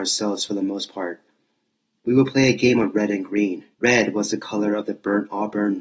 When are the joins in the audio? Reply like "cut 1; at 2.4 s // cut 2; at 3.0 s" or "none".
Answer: cut 1; at 3.7 s